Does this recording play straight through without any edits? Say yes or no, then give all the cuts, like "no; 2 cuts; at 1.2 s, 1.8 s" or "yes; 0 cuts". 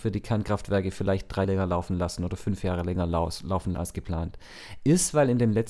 no; 2 cuts; at 1.4 s, 3.7 s